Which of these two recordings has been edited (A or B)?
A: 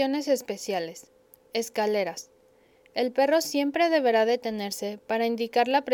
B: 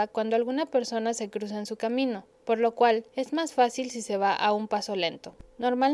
B